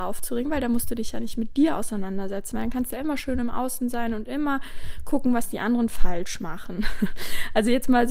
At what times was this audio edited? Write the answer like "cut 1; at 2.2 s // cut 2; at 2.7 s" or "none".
none